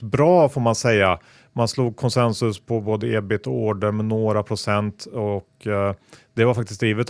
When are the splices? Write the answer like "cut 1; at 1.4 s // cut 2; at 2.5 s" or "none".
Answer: none